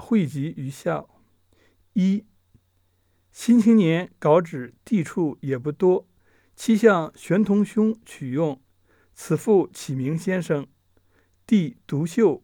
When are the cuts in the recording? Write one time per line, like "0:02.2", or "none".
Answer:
none